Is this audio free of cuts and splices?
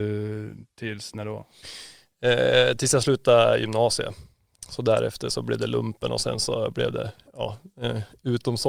yes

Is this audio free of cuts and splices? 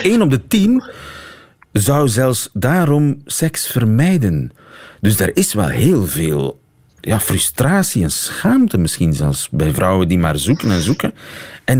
yes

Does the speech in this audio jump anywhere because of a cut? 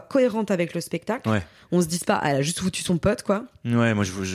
no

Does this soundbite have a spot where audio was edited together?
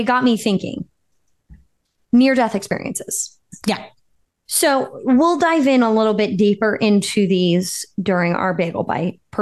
no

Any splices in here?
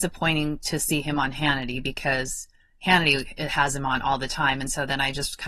no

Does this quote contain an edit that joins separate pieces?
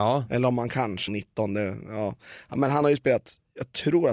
yes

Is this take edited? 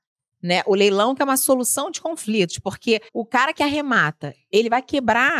yes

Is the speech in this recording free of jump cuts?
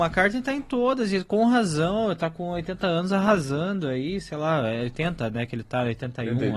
yes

